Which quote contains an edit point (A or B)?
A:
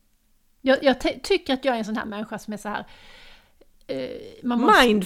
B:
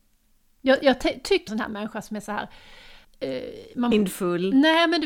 B